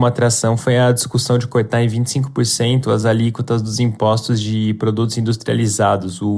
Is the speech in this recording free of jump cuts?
yes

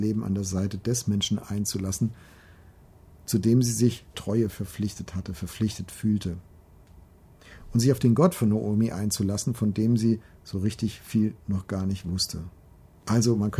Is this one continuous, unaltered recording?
no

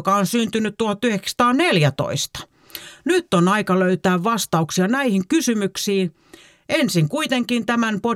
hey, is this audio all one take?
yes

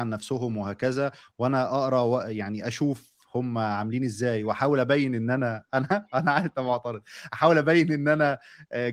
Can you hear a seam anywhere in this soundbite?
no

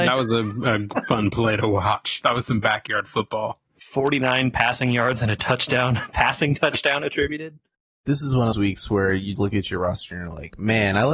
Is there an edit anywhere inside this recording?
yes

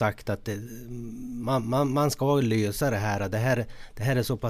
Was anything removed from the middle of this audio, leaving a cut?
no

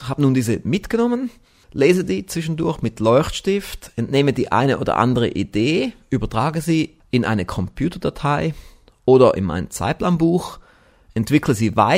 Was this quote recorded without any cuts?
yes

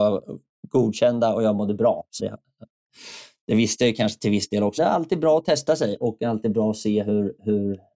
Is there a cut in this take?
yes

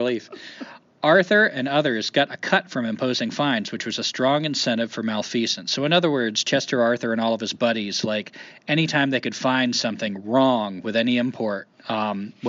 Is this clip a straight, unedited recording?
yes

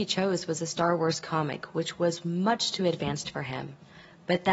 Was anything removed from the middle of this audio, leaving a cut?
no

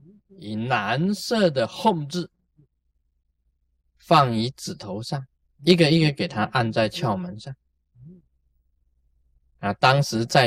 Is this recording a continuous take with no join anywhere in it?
yes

